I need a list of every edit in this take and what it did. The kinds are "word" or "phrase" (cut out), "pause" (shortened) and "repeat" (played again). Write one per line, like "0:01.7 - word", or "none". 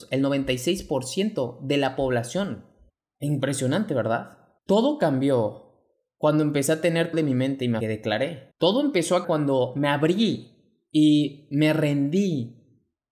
0:02.9 - pause
0:04.6 - pause
0:07.1 - word
0:07.8 - phrase
0:08.5 - pause
0:09.2 - word